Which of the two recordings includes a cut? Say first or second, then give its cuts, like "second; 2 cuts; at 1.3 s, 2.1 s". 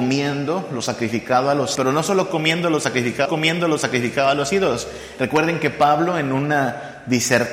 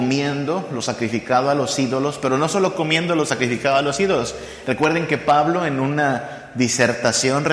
first; 2 cuts; at 1.8 s, 3.3 s